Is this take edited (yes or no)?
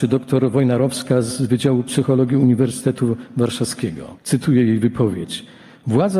yes